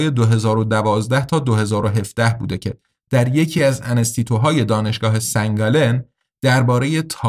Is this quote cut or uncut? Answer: uncut